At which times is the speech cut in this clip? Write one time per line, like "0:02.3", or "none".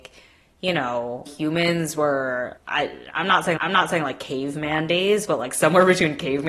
0:01.3
0:02.6
0:03.6